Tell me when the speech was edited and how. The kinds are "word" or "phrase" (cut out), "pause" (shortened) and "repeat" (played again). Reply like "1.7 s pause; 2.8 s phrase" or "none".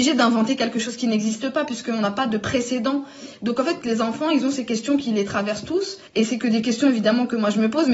6.1 s pause